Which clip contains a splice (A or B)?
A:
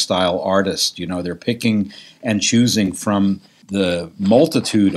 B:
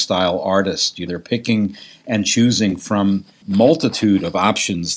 B